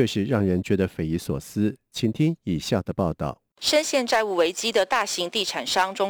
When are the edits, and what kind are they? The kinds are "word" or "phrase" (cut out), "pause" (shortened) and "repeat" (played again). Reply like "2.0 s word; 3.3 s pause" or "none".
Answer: 3.5 s pause